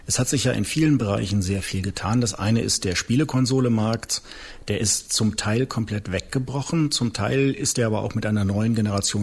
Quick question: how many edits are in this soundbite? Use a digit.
0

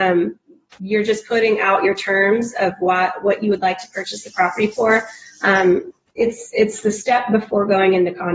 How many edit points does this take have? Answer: 0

